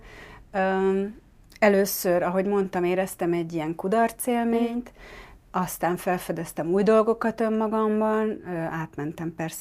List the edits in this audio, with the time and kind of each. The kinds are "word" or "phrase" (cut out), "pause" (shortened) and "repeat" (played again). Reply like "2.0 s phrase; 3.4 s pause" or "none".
none